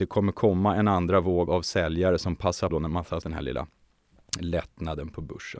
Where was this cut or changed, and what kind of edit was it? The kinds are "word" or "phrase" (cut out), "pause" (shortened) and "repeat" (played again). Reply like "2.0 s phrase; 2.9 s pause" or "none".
1.5 s word; 2.7 s word; 3.2 s word